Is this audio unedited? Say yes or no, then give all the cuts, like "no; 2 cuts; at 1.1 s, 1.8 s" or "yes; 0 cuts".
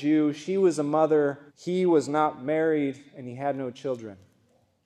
no; 1 cut; at 1.5 s